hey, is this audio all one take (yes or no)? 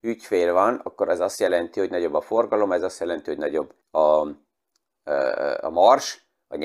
no